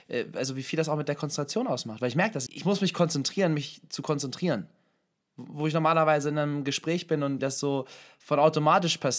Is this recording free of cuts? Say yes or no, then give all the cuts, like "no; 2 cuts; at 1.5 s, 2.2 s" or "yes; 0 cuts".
no; 2 cuts; at 2.5 s, 7.4 s